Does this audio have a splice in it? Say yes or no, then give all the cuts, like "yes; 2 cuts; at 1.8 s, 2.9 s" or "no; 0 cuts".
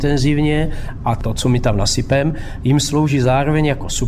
no; 0 cuts